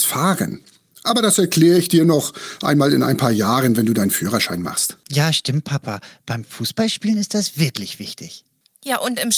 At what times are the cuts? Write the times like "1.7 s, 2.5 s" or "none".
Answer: none